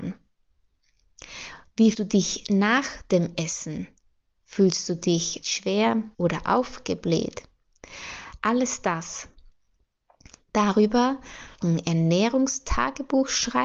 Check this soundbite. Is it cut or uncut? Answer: cut